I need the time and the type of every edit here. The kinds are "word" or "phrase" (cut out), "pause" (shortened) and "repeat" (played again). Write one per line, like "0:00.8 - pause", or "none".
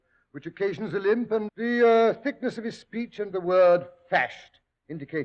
0:01.5 - word
0:03.3 - phrase